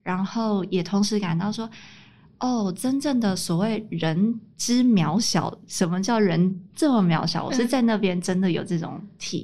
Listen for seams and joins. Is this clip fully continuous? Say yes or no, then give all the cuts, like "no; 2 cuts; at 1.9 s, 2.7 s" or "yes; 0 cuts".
yes; 0 cuts